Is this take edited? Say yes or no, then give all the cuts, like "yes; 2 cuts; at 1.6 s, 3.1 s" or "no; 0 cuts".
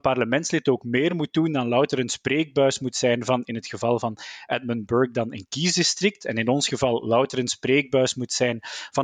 no; 0 cuts